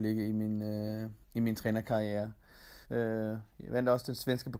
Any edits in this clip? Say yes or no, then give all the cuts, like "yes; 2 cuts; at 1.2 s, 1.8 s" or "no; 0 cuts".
yes; 2 cuts; at 1.2 s, 2.8 s